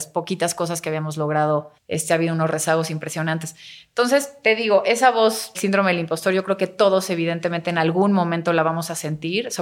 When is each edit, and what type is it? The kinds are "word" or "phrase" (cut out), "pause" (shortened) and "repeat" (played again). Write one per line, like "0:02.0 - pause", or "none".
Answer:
0:01.8 - pause
0:05.5 - word